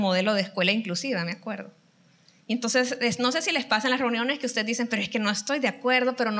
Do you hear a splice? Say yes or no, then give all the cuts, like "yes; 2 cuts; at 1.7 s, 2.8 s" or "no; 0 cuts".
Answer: no; 0 cuts